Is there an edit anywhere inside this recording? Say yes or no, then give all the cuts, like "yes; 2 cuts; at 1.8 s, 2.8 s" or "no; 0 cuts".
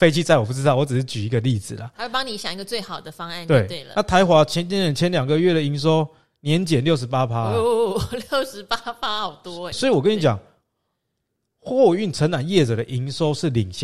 yes; 1 cut; at 9.7 s